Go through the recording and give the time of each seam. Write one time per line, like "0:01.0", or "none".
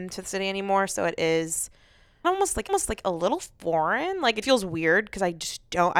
0:02.2
0:02.7
0:04.4